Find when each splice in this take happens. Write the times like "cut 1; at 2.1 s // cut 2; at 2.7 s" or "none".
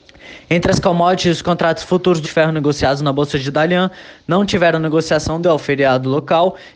cut 1; at 2.2 s // cut 2; at 5.4 s

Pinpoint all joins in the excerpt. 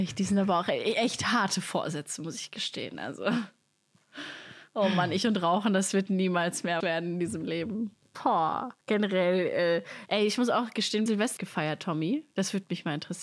cut 1; at 6.8 s // cut 2; at 8.8 s // cut 3; at 11.1 s // cut 4; at 11.4 s

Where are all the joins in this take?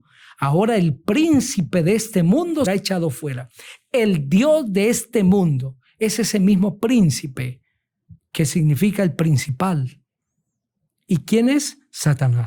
cut 1; at 2.7 s // cut 2; at 8.2 s

